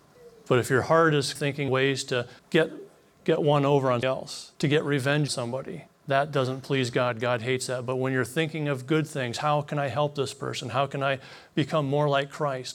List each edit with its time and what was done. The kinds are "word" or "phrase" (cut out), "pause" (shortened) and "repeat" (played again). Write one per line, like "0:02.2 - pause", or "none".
0:01.4 - word
0:01.7 - word
0:02.4 - pause
0:04.0 - word
0:04.5 - pause
0:05.3 - word
0:05.9 - pause